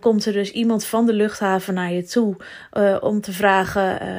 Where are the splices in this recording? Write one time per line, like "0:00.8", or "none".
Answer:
none